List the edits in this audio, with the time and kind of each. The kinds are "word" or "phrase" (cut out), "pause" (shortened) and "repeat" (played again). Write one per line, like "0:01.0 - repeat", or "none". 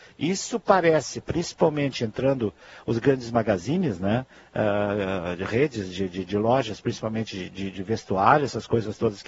none